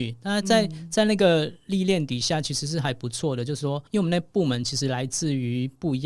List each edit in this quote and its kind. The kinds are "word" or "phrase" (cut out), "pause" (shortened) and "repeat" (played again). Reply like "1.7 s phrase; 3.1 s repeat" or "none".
3.9 s pause